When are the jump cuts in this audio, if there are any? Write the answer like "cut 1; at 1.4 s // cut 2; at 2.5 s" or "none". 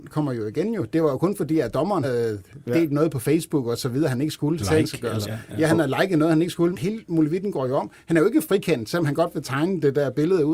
cut 1; at 2.0 s // cut 2; at 4.6 s // cut 3; at 5.2 s // cut 4; at 6.7 s